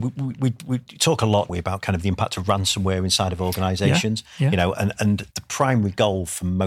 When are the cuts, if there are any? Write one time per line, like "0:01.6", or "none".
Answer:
0:01.5
0:05.3